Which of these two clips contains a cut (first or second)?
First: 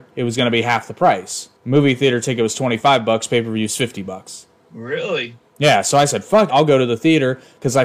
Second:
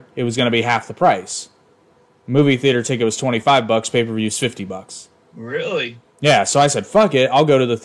first